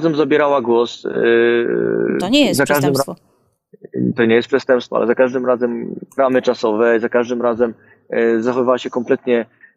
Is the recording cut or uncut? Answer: cut